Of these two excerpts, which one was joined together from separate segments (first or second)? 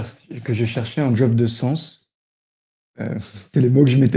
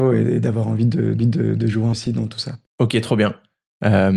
second